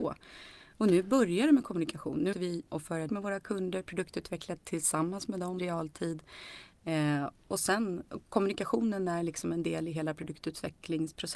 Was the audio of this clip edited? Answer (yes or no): yes